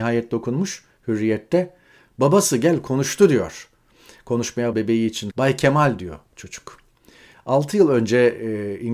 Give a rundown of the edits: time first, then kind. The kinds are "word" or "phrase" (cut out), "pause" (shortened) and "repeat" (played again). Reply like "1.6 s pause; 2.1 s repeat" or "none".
4.7 s word; 5.3 s word